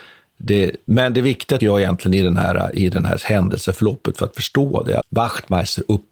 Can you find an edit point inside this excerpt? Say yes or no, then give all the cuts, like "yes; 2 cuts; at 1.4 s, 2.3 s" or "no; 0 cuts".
yes; 2 cuts; at 1.6 s, 5.0 s